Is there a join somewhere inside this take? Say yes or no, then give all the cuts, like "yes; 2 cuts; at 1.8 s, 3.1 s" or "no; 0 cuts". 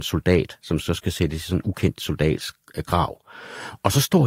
no; 0 cuts